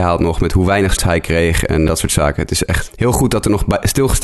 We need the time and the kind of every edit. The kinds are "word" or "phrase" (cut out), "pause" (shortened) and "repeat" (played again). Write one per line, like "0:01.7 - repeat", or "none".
0:01.0 - word
0:01.9 - phrase
0:02.9 - word

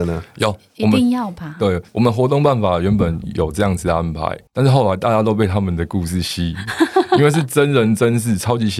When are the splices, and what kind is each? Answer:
0:01.9 - pause
0:04.5 - pause

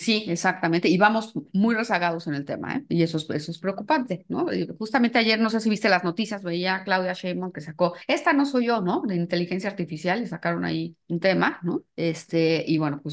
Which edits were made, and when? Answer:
0:08.0 - pause
0:11.0 - pause
0:11.9 - pause

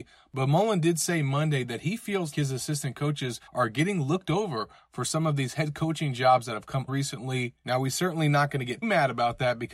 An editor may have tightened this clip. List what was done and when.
0:02.3 - word
0:03.5 - pause
0:06.9 - word
0:08.8 - word

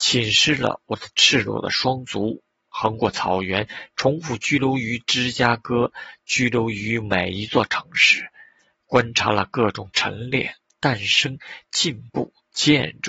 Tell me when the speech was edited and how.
none

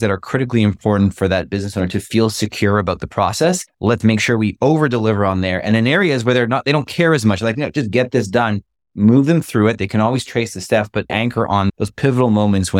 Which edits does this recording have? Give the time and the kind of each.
0:03.7 - pause
0:11.1 - word

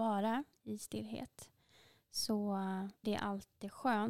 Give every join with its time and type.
0:03.0 - word

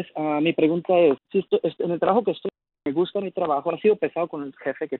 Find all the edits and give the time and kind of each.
0:01.2 - word

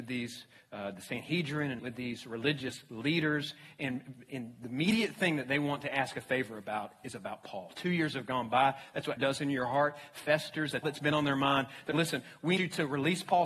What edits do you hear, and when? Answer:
0:01.8 - word
0:04.3 - word
0:09.2 - word
0:10.8 - word
0:11.9 - word
0:12.6 - word

